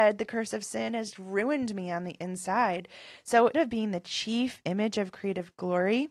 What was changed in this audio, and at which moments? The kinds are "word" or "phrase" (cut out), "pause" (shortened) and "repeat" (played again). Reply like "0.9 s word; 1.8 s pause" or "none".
1.1 s word; 3.5 s word

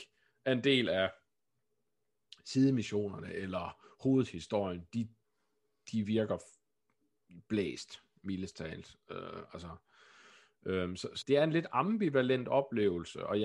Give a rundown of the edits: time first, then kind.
11.2 s phrase

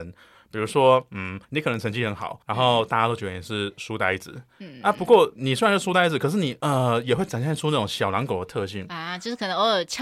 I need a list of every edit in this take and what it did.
1.4 s pause; 2.4 s pause

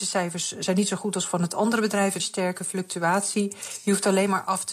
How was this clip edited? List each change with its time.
2.2 s word

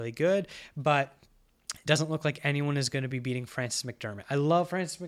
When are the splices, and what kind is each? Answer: none

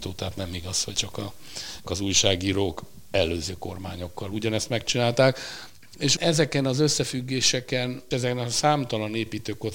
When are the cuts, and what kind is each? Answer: 0.9 s word; 1.8 s word; 6.2 s word; 8.1 s word

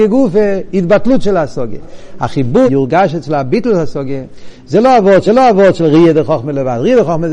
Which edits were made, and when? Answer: 2.7 s phrase; 5.3 s repeat

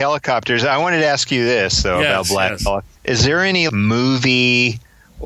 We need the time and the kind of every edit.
3.0 s pause; 3.7 s word

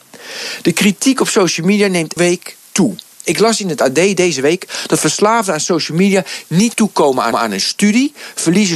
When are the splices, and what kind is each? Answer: 2.2 s word; 6.7 s word; 7.3 s repeat

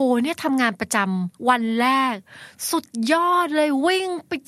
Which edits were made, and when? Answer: 1.4 s pause

